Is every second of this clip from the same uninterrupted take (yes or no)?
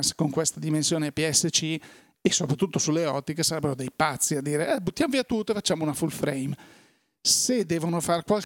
yes